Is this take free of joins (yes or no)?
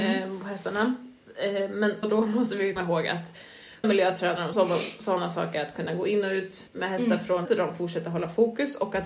no